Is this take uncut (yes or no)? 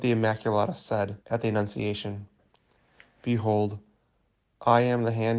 no